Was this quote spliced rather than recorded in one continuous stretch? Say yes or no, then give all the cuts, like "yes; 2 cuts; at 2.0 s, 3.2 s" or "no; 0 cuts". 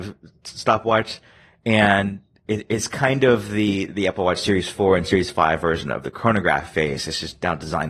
no; 0 cuts